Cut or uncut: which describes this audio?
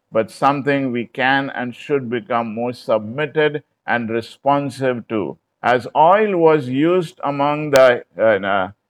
cut